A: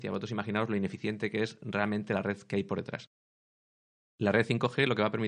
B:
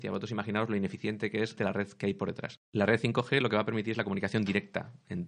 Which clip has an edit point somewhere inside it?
B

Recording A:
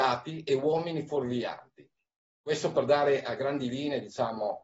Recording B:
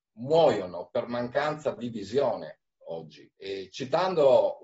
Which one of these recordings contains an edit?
B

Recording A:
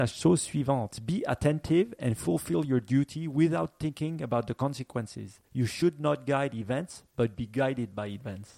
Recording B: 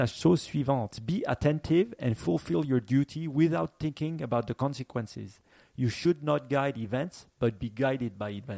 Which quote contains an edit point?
A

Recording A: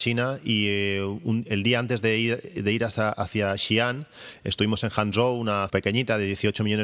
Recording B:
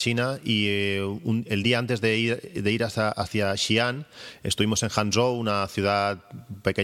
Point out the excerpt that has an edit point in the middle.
A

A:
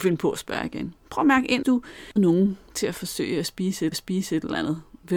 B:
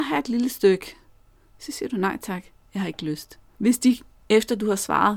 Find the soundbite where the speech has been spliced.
A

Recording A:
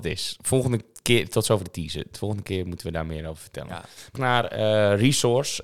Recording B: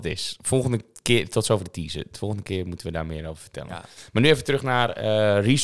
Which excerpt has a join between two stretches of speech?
A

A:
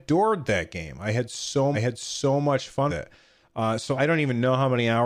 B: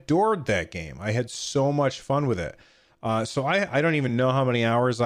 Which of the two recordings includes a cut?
A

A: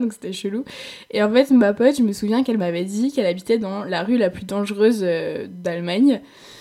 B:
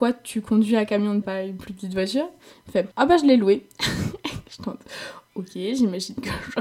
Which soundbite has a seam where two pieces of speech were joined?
B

